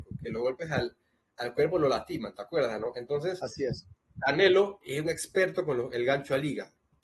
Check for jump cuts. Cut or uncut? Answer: uncut